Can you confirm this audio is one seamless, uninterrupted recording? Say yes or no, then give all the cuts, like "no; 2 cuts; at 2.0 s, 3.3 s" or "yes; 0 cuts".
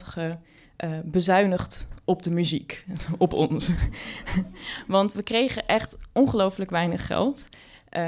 yes; 0 cuts